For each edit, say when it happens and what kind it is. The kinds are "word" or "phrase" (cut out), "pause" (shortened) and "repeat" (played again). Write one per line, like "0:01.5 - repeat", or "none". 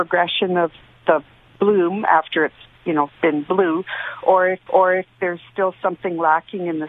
0:03.1 - pause
0:04.7 - repeat